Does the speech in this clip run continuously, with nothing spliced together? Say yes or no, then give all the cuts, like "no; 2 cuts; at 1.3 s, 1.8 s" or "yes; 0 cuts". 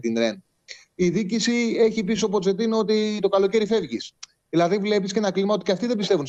yes; 0 cuts